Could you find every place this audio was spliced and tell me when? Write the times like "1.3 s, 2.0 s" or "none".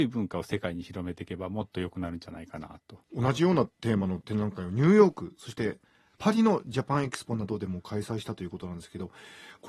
3.0 s